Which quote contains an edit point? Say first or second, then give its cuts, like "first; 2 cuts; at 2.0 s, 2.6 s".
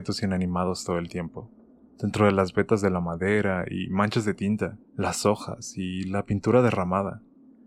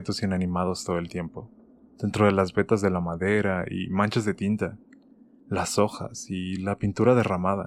first; 1 cut; at 4.9 s